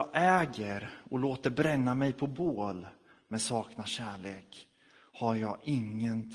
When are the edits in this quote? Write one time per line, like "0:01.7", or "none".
none